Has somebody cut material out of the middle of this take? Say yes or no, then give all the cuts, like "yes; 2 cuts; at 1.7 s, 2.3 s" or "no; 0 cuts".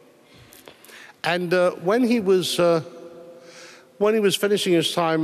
no; 0 cuts